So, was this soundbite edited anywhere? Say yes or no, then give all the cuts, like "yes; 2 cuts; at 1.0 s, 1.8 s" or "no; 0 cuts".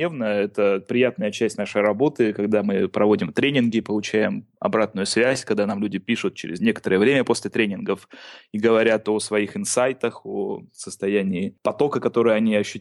no; 0 cuts